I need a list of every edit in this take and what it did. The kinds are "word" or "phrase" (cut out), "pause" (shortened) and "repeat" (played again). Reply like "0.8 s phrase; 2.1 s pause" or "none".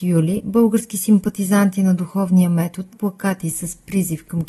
2.9 s word

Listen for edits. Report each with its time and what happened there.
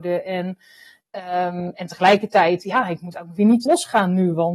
3.7 s word

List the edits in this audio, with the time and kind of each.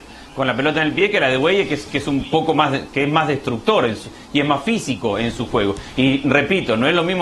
none

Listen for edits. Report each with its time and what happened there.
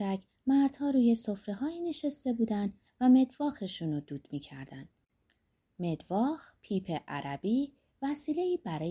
none

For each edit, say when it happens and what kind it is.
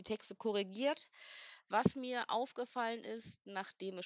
none

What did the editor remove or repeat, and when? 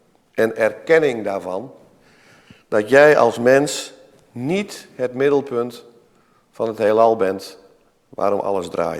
none

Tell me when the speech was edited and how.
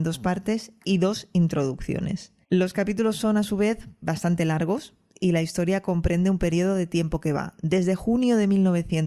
2.4 s pause

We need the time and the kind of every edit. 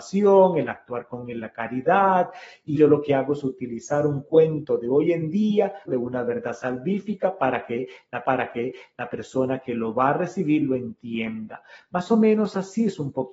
2.8 s word; 5.9 s phrase; 8.2 s repeat

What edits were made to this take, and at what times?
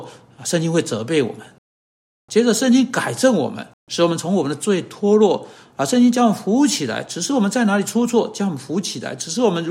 3.8 s pause

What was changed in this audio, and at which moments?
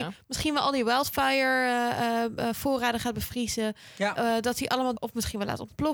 5.0 s word

